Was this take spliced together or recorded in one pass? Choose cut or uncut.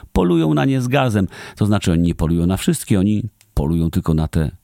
uncut